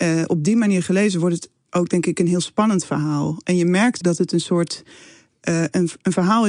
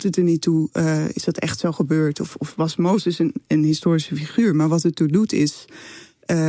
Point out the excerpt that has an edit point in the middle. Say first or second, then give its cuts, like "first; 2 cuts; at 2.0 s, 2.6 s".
first; 1 cut; at 4.0 s